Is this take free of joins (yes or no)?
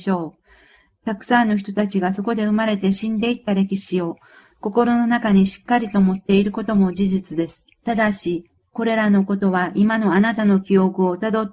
no